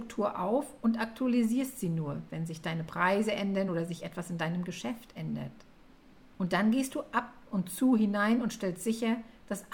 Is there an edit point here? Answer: no; 0 cuts

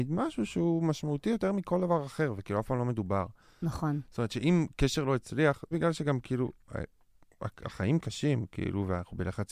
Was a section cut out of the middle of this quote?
yes; 1 cut; at 5.7 s

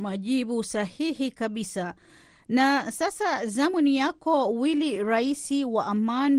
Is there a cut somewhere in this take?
no; 0 cuts

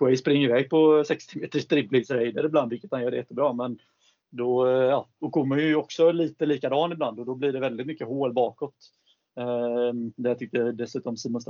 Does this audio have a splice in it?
no; 0 cuts

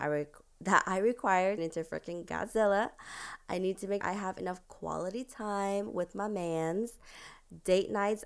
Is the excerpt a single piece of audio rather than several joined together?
no; 3 cuts; at 1.6 s, 4.0 s, 4.6 s

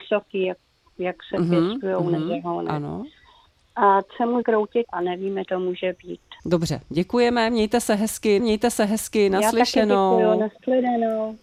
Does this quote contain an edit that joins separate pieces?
yes; 6 cuts; at 4.1 s, 4.4 s, 4.8 s, 5.5 s, 6.4 s, 8.4 s

